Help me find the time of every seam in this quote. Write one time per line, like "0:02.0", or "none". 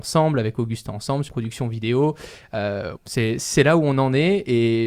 0:01.3
0:03.0